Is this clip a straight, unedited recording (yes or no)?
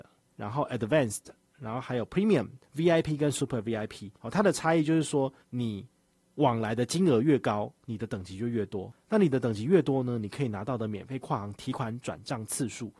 no